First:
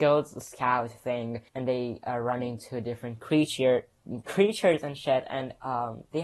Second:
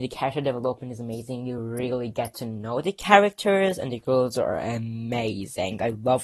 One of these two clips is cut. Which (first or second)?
first